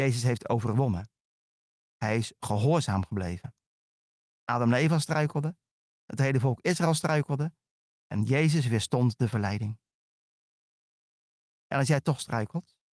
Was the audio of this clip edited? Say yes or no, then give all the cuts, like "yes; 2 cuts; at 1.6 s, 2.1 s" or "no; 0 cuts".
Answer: no; 0 cuts